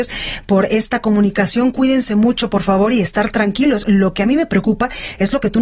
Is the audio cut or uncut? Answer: uncut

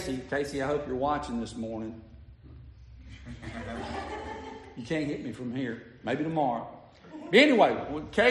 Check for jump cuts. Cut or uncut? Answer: uncut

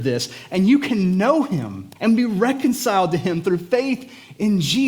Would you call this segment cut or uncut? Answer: cut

